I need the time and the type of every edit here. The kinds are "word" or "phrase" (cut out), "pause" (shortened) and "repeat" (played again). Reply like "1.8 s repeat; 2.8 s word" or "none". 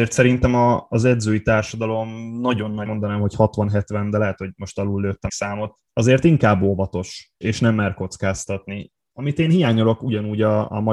2.9 s word; 5.3 s phrase; 5.9 s pause; 7.4 s word